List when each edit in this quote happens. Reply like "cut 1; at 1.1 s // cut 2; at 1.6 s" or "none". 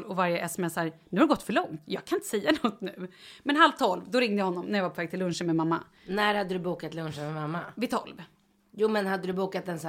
none